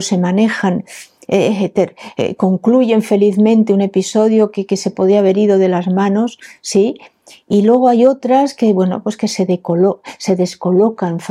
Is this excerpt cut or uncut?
uncut